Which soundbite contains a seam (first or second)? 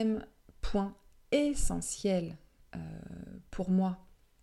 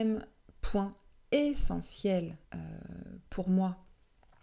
second